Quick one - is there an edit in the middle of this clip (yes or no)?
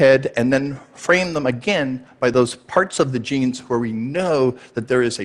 no